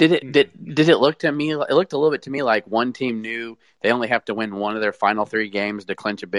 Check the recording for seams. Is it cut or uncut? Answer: uncut